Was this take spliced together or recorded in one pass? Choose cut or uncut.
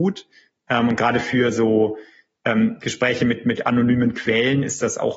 uncut